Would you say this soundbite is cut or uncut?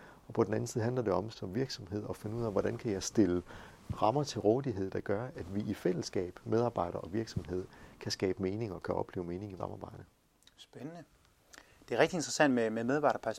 cut